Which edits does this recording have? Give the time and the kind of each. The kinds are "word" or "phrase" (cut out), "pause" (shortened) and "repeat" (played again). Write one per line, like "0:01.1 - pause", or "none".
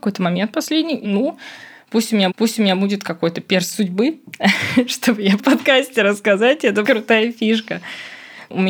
0:01.0 - word
0:02.3 - repeat
0:05.4 - phrase
0:06.8 - word